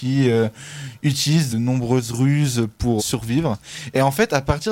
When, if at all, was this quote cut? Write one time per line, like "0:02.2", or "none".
0:01.5
0:03.0

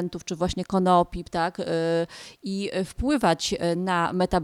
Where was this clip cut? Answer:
none

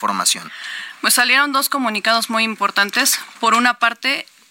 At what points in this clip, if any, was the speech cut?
none

